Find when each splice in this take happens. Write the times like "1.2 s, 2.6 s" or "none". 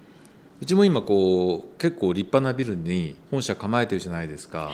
3.2 s